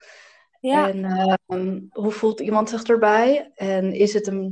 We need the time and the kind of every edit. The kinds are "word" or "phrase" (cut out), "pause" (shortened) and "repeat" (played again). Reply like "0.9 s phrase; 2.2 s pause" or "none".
none